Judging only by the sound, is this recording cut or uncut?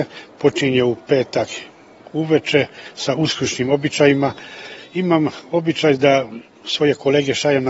uncut